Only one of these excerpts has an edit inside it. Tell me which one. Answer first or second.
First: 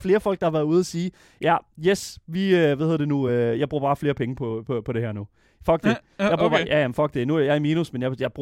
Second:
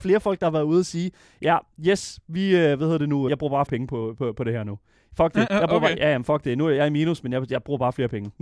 second